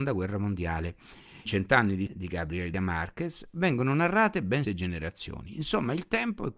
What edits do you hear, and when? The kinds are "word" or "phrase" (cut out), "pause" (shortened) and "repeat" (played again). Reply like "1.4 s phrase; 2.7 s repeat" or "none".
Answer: 1.5 s word; 2.1 s word; 2.7 s word; 4.6 s word